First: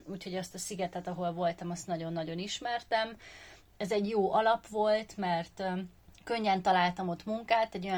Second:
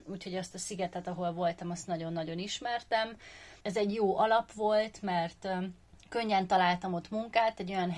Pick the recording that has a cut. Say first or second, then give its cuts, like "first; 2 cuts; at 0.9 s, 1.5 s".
second; 1 cut; at 3.6 s